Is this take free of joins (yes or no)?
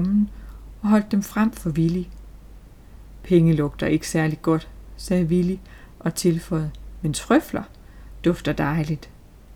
yes